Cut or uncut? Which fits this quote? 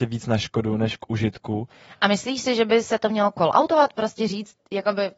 uncut